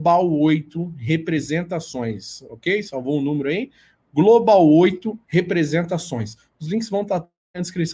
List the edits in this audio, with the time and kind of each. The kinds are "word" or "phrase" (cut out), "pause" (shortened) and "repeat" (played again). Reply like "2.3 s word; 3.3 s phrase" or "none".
5.2 s pause